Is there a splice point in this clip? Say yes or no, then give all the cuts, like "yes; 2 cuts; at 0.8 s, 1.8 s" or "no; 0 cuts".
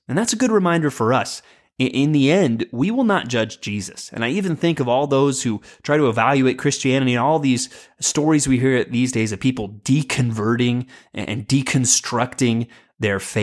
no; 0 cuts